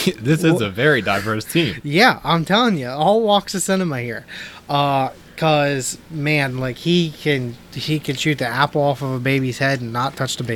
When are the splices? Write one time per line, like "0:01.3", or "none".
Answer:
none